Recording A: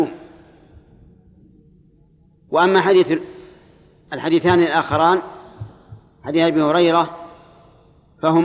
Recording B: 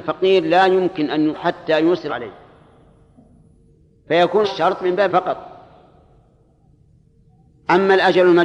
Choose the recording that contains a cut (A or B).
B